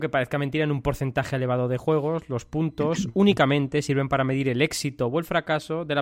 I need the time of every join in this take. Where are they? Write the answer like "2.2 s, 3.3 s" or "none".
none